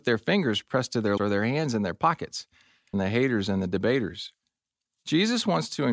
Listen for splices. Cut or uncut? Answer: cut